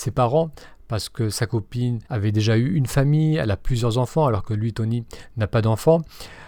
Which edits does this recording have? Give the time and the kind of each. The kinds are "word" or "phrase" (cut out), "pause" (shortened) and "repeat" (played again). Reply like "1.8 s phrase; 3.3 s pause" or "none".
2.1 s pause